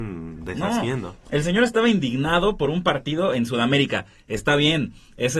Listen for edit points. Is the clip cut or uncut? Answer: uncut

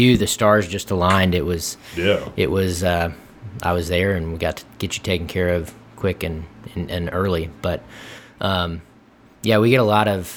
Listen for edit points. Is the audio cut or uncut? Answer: uncut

